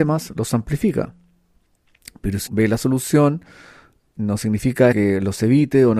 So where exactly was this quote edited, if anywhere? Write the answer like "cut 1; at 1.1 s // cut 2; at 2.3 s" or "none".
cut 1; at 2.5 s // cut 2; at 4.9 s

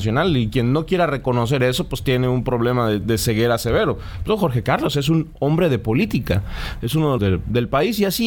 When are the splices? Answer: cut 1; at 7.2 s

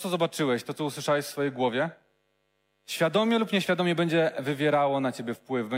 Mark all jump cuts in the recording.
none

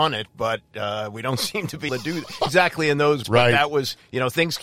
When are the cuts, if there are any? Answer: cut 1; at 1.9 s // cut 2; at 2.5 s // cut 3; at 3.2 s

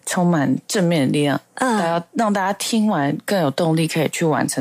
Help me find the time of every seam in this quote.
none

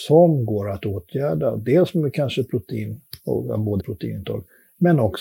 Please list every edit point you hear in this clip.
cut 1; at 3.8 s

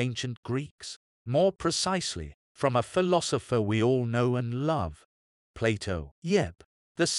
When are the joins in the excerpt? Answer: cut 1; at 2.4 s // cut 2; at 6.1 s

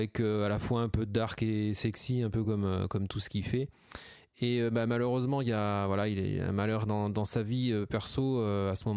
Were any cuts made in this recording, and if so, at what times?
none

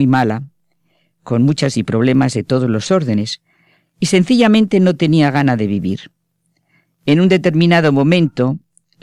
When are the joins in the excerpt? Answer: cut 1; at 1.7 s

